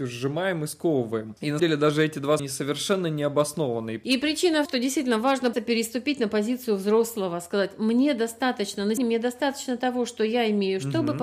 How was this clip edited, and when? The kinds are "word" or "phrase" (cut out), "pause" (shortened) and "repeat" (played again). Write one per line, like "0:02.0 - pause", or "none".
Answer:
0:01.6 - word
0:02.4 - word
0:04.7 - phrase
0:05.5 - word
0:09.0 - word

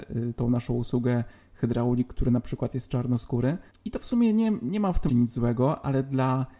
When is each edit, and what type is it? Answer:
0:05.1 - word

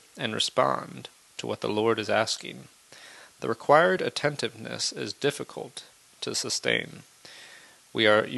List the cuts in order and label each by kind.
none

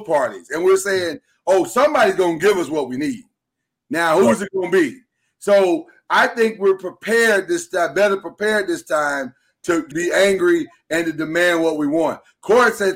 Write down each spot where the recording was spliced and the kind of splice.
0:09.9 - word

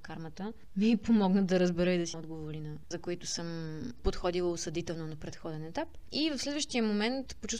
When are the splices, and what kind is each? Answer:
0:02.1 - word
0:02.9 - word

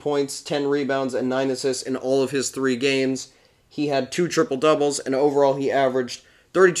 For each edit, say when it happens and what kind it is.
none

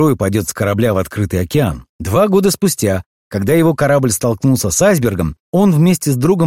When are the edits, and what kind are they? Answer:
0:01.9 - pause
0:05.4 - pause

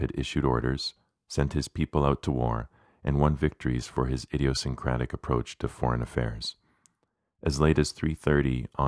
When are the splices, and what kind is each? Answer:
none

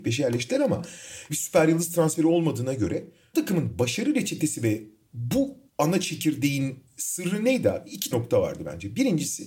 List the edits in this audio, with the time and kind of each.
0:01.3 - word
0:03.3 - word
0:05.7 - pause
0:08.1 - word

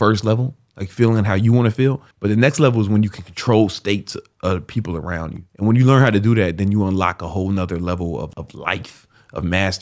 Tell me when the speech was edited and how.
0:02.1 - pause

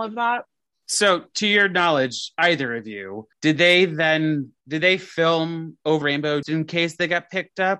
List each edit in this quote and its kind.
0:03.3 - pause
0:04.6 - pause
0:06.0 - word
0:06.4 - word

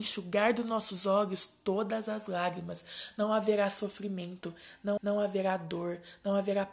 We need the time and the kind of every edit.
0:05.0 - repeat

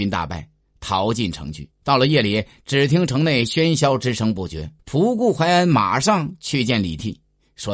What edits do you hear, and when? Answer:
0:01.7 - pause
0:04.8 - pause

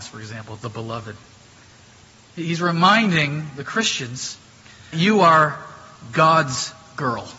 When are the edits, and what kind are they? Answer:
0:04.9 - word

